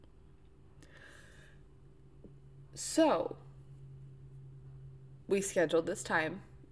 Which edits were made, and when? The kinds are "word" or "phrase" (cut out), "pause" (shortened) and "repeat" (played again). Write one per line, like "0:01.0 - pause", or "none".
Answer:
0:05.2 - pause